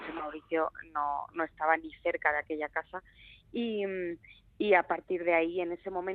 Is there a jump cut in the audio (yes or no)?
no